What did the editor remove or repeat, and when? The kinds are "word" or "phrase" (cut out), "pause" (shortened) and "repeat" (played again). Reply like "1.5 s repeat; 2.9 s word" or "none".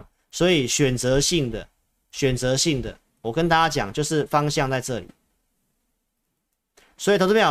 none